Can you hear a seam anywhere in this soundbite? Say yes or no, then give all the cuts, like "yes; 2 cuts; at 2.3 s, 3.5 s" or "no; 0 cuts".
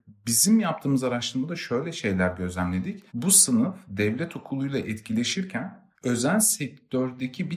yes; 2 cuts; at 3.1 s, 5.9 s